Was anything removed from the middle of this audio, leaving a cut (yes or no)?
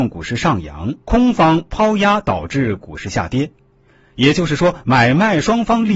yes